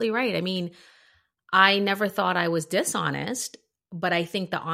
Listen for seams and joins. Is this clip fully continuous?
yes; 0 cuts

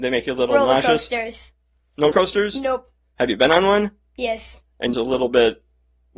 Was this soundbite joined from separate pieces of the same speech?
yes; 2 cuts; at 2.1 s, 4.9 s

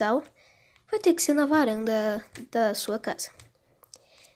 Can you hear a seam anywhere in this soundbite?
no; 0 cuts

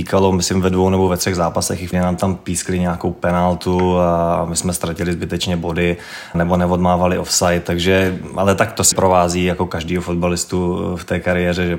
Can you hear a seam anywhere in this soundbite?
yes; 3 cuts; at 1.9 s, 6.3 s, 8.9 s

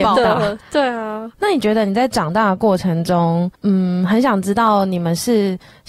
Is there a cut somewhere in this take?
yes; 1 cut; at 3.5 s

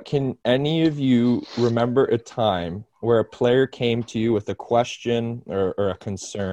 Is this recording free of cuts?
yes; 0 cuts

